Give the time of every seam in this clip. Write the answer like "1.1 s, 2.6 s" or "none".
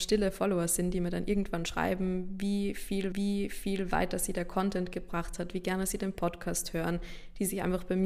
3.1 s